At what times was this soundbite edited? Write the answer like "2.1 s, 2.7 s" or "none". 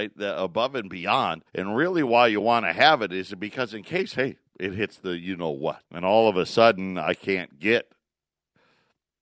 1.5 s, 4.5 s, 5.9 s